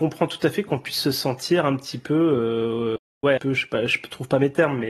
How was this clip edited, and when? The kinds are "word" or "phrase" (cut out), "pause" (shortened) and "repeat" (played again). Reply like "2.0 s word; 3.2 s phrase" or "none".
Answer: 3.4 s phrase